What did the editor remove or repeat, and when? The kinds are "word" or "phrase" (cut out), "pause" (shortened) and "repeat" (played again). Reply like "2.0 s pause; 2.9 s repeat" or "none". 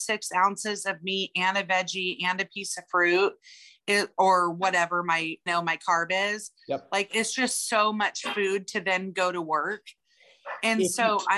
5.5 s word